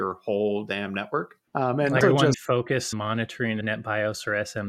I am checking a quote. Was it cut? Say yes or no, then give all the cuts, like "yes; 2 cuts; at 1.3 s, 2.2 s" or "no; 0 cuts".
yes; 5 cuts; at 1.5 s, 2.0 s, 2.3 s, 2.9 s, 3.6 s